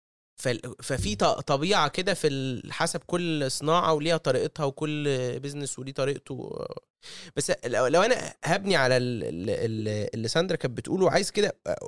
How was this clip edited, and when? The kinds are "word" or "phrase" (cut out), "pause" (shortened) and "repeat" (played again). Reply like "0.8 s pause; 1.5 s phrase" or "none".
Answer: none